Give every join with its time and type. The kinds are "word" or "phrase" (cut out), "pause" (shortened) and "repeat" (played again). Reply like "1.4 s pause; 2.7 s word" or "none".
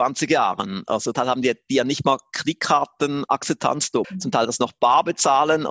1.1 s word; 4.0 s word